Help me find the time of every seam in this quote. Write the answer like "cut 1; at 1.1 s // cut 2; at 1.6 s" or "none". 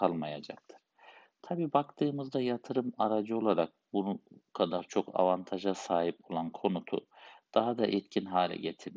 none